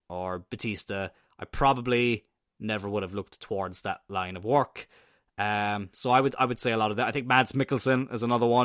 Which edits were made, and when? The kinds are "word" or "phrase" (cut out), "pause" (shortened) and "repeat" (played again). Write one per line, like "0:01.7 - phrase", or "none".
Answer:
none